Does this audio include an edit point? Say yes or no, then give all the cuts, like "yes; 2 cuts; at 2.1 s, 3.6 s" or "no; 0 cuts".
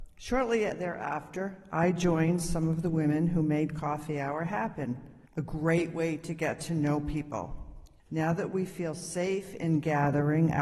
yes; 2 cuts; at 5.3 s, 8.0 s